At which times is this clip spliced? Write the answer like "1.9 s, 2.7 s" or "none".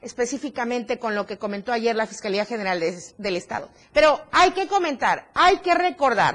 3.8 s